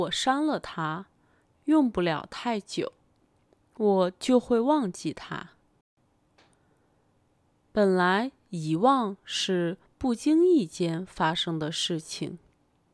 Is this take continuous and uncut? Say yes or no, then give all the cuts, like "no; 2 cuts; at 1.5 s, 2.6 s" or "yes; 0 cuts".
yes; 0 cuts